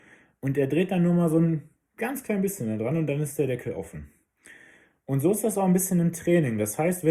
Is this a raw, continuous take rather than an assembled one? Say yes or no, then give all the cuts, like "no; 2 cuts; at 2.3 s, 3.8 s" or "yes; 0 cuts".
yes; 0 cuts